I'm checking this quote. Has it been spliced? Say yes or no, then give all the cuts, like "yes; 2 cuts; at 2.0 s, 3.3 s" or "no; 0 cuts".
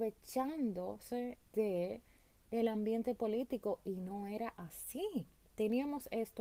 yes; 1 cut; at 1.4 s